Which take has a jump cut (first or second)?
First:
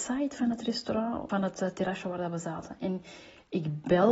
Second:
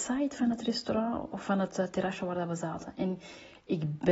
first